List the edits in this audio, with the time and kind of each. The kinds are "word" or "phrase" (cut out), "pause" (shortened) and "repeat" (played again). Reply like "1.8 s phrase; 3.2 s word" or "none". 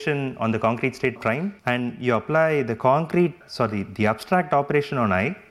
1.2 s phrase; 1.6 s pause; 3.4 s word

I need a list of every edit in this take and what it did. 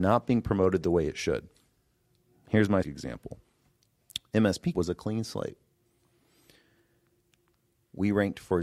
2.8 s word; 4.7 s word

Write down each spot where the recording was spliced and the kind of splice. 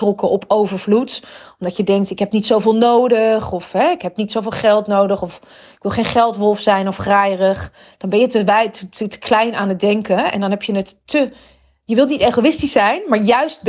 none

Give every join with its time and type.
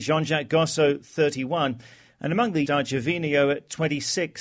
2.6 s word

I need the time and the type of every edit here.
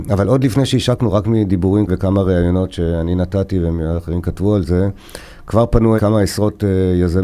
1.9 s word; 6.0 s word

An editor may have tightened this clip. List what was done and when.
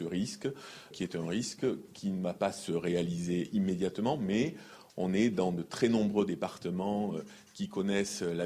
0.9 s word

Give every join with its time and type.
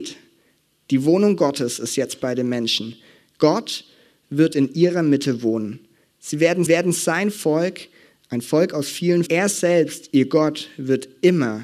6.7 s repeat; 9.3 s phrase

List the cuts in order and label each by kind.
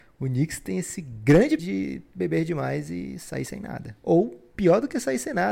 1.6 s phrase

